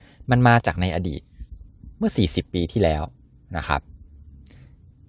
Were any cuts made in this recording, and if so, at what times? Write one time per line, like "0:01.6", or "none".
none